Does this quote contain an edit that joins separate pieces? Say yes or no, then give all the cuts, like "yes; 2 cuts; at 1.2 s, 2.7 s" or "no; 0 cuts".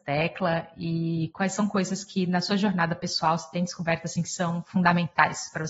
no; 0 cuts